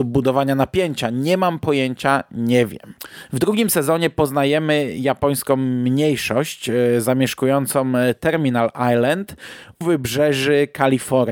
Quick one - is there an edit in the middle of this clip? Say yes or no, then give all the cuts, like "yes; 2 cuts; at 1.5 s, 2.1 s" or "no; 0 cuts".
yes; 1 cut; at 9.8 s